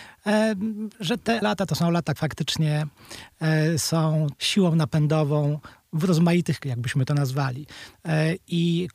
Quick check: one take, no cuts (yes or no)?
no